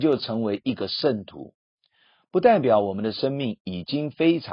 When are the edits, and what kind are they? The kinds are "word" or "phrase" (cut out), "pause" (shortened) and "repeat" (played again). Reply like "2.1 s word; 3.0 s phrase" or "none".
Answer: none